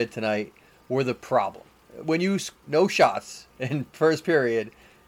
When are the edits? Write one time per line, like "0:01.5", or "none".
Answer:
0:02.6
0:03.5